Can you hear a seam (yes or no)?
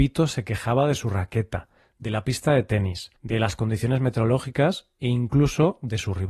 yes